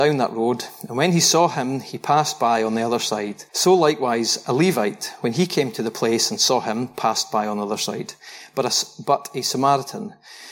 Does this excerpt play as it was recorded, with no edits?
no; 1 cut; at 3.5 s

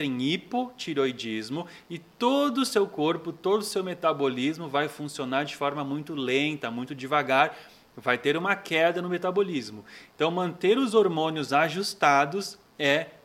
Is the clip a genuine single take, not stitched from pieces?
yes; 0 cuts

